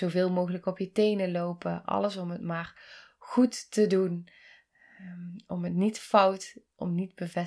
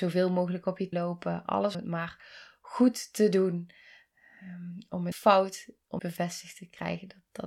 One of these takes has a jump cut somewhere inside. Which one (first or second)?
second